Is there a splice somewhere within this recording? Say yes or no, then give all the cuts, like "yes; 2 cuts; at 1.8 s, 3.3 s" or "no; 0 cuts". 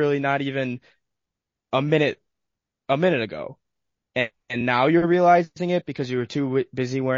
no; 0 cuts